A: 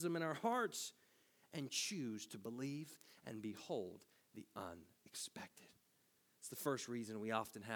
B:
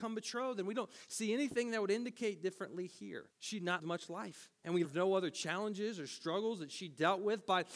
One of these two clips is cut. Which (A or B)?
B